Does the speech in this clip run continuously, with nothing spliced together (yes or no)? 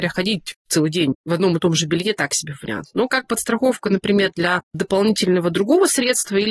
yes